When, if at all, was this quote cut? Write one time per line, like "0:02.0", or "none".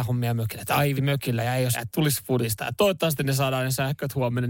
0:01.0
0:01.7